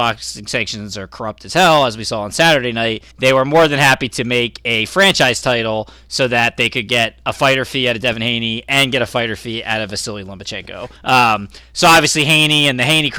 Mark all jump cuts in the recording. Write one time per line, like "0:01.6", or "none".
0:03.1
0:11.0